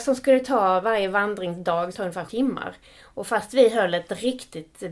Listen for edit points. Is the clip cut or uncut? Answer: cut